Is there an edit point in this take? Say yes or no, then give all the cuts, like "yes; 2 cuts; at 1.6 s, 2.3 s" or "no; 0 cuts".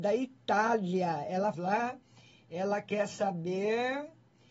yes; 1 cut; at 1.5 s